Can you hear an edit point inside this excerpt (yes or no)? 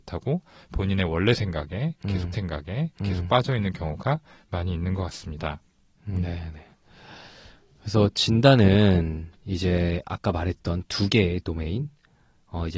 yes